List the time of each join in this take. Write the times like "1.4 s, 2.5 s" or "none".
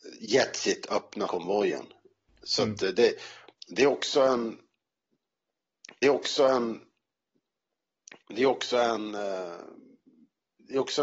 1.3 s, 3.5 s, 6.0 s